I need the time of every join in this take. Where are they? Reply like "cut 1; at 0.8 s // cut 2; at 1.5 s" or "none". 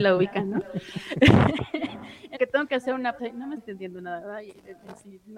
cut 1; at 2.4 s // cut 2; at 3.2 s // cut 3; at 3.6 s